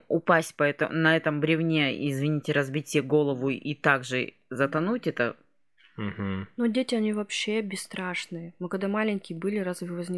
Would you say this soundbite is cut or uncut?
uncut